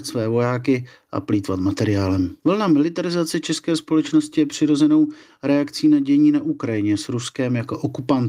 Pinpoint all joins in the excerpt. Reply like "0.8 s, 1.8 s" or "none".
2.4 s